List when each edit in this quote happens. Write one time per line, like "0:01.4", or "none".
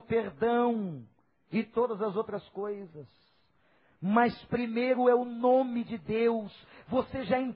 none